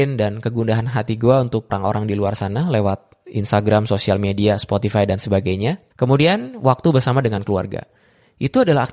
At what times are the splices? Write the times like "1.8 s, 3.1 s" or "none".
1.7 s, 5.9 s